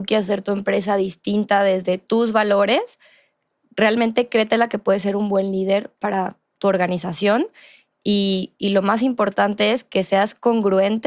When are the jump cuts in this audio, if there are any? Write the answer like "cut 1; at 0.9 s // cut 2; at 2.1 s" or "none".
none